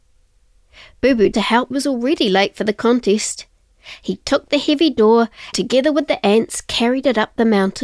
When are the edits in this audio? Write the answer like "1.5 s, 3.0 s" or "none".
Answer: 1.3 s, 1.7 s, 5.5 s